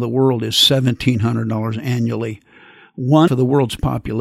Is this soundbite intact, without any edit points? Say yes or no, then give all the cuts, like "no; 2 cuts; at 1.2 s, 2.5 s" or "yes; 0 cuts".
no; 1 cut; at 3.3 s